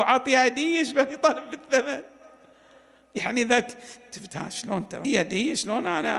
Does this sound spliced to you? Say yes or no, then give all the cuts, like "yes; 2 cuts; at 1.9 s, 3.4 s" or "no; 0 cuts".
yes; 1 cut; at 5.0 s